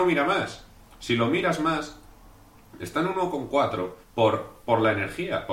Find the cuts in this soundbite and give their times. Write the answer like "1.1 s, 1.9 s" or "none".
4.0 s